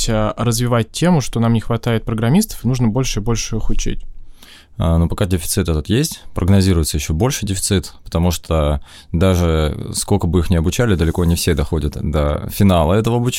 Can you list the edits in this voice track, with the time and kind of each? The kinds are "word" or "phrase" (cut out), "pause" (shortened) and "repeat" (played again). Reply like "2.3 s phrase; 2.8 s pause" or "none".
none